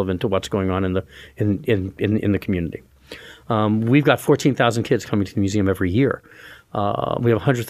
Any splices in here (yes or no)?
no